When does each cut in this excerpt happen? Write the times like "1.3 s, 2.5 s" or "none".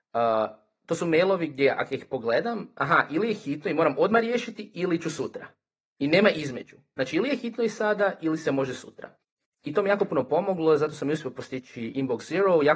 none

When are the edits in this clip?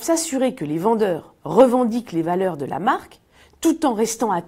1.4 s

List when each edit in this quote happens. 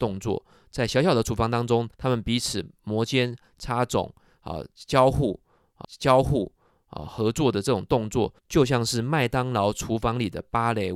1.9 s, 5.8 s, 8.4 s

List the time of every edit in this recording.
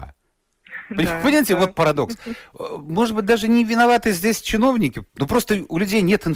5.1 s

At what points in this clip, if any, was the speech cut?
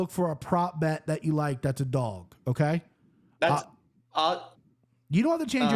none

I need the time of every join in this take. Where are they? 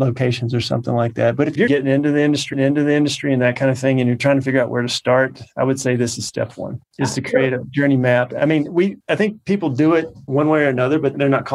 1.7 s, 2.5 s, 6.9 s, 9.0 s

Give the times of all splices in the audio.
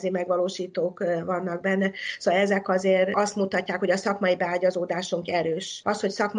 none

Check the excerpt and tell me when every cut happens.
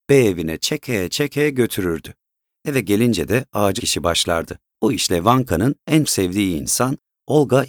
3.8 s, 4.7 s, 6.0 s

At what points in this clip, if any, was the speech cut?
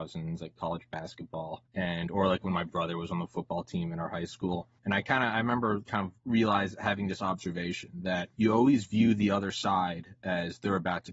1.7 s, 4.8 s, 6.2 s, 8.3 s

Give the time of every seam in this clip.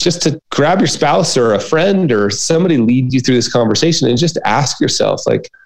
none

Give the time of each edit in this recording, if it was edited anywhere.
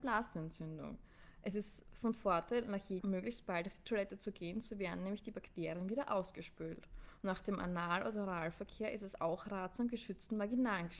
3.0 s

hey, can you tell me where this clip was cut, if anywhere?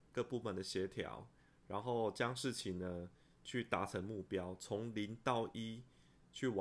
none

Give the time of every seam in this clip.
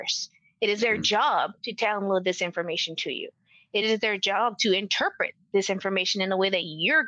none

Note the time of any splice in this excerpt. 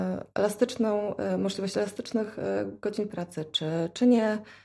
none

